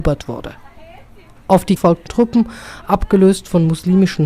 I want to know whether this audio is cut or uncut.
cut